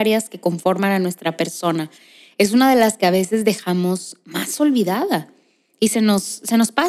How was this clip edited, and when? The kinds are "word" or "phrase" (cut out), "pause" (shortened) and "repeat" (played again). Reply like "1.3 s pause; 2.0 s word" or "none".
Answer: none